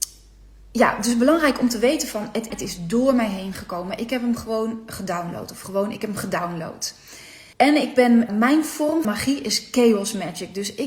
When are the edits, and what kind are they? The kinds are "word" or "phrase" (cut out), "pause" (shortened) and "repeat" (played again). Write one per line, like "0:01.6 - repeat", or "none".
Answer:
0:02.5 - phrase
0:07.5 - pause
0:08.3 - word
0:09.0 - word